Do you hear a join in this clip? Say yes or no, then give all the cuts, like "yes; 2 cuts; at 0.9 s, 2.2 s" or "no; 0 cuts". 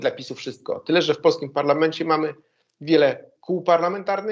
no; 0 cuts